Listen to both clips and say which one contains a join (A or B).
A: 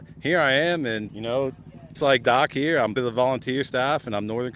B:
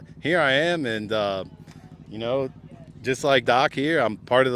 A